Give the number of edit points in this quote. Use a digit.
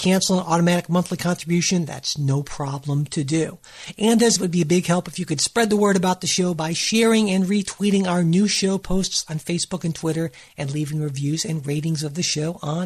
1